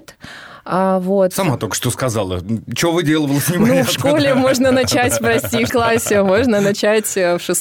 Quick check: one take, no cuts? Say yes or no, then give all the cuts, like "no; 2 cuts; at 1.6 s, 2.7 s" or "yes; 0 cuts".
no; 1 cut; at 5.7 s